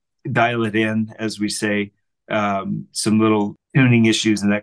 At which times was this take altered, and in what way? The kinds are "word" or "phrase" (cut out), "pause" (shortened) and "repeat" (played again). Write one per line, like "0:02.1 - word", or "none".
none